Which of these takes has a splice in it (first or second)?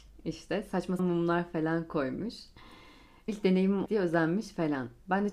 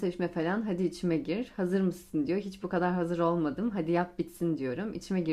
first